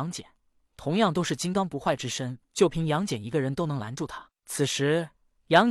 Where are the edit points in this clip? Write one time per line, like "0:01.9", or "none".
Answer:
0:02.4